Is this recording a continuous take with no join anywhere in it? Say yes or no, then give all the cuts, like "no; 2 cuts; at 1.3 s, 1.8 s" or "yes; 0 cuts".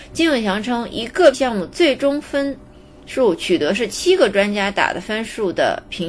no; 1 cut; at 1.3 s